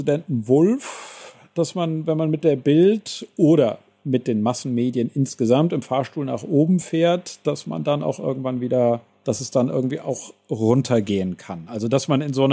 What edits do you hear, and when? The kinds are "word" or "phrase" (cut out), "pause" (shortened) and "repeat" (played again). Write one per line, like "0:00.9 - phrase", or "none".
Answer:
none